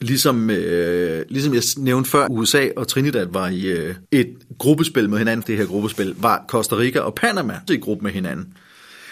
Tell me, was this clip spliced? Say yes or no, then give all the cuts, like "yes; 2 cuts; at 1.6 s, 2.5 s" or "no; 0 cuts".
yes; 4 cuts; at 2.3 s, 4.0 s, 5.4 s, 7.7 s